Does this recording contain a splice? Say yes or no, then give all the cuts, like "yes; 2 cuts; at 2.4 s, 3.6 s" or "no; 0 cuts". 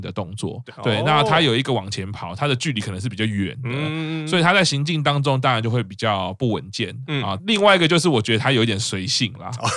no; 0 cuts